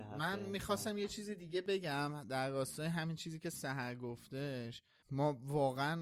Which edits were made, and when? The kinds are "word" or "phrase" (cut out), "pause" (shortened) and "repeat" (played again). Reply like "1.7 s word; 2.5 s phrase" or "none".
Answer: 5.0 s word